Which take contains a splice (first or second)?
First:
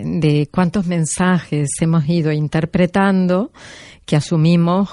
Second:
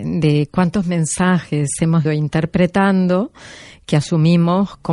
second